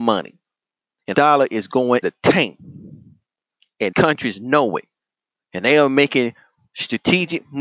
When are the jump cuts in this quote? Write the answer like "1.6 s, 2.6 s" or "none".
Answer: 1.1 s, 2.0 s, 3.9 s

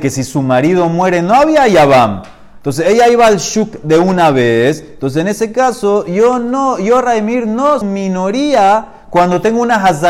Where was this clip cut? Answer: 7.8 s

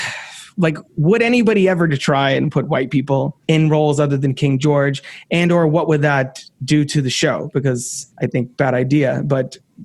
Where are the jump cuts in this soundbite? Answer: 1.9 s, 3.4 s, 8.1 s

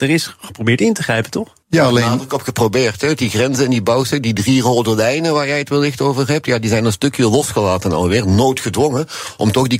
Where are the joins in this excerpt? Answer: 1.6 s

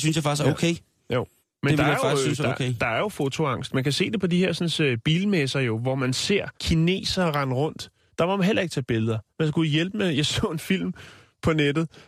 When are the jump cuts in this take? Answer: 1.4 s, 6.6 s, 8.1 s, 9.3 s

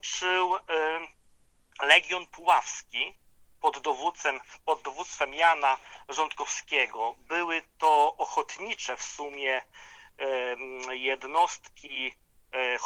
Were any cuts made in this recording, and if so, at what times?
none

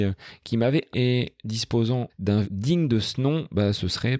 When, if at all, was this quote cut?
0.9 s, 2.1 s, 2.4 s

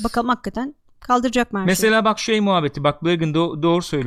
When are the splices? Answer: none

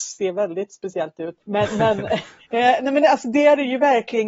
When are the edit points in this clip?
1.4 s, 2.4 s

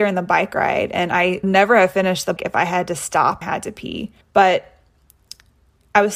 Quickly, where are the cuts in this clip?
1.4 s, 2.4 s, 3.4 s, 4.2 s

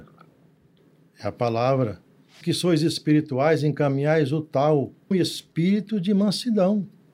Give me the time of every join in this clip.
2.4 s, 5.1 s

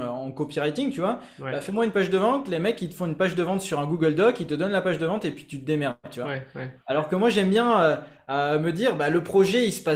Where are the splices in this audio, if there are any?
none

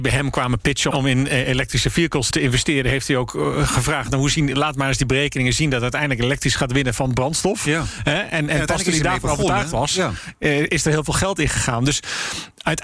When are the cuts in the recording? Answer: 0.9 s, 2.3 s

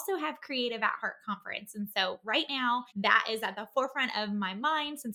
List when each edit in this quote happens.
2.9 s

